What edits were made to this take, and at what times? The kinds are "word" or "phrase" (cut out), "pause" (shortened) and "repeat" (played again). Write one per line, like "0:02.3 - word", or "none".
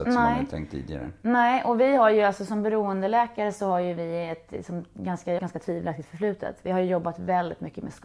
0:05.4 - phrase